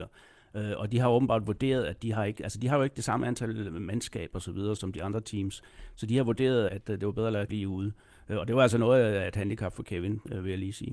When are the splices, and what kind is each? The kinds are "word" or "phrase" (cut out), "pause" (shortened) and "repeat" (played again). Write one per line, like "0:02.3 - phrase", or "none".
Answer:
0:04.8 - word
0:06.7 - word
0:07.5 - word